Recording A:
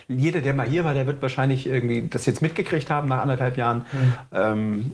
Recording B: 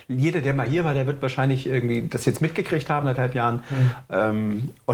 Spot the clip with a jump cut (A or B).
B